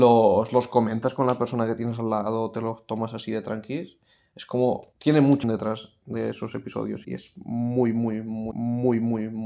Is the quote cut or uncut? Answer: cut